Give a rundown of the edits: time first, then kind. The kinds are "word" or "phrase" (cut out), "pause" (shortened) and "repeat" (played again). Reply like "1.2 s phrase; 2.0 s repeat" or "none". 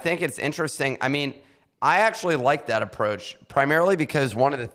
none